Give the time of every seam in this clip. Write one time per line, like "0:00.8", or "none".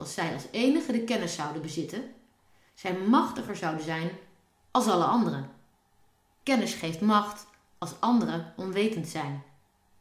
none